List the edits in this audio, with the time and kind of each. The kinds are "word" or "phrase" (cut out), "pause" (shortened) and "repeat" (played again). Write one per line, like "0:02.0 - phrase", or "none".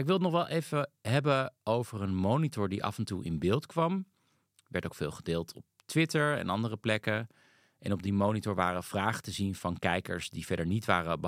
none